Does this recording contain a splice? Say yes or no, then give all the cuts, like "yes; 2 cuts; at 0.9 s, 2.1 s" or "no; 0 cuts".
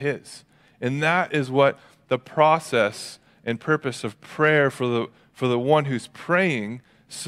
no; 0 cuts